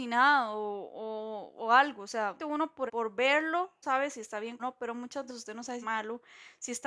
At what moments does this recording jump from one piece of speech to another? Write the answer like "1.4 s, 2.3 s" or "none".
2.4 s, 2.9 s, 3.8 s, 4.6 s, 5.3 s, 5.8 s